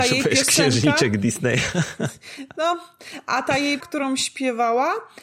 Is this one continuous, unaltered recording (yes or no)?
no